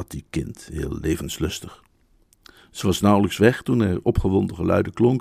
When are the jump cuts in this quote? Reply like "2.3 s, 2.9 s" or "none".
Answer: none